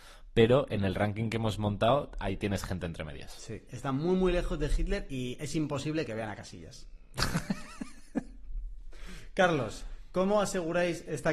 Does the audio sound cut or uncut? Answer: uncut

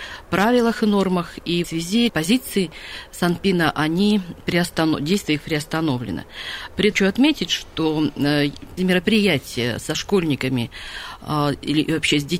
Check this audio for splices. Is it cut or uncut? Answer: cut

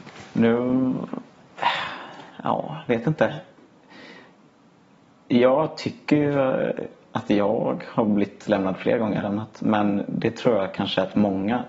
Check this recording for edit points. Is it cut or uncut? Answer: cut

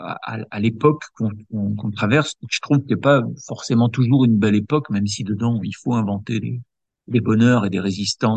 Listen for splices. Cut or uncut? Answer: uncut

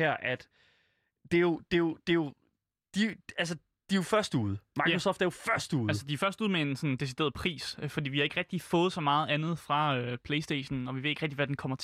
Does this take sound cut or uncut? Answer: uncut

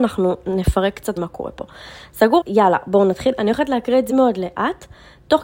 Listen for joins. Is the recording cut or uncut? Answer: cut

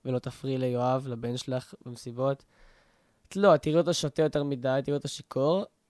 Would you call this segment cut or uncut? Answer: uncut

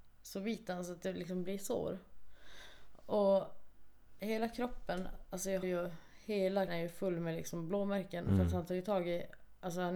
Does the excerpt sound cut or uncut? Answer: cut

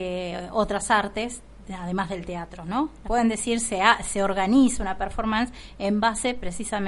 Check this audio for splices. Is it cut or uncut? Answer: cut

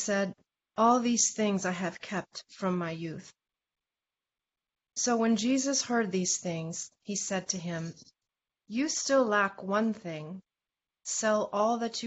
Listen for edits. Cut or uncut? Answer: uncut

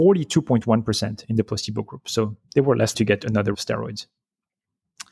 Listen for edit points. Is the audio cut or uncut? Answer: cut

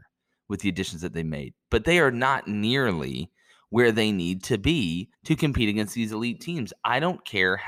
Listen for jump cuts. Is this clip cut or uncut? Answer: cut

